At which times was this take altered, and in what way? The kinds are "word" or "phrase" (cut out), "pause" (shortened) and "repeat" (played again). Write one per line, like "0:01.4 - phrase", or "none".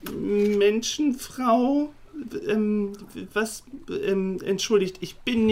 none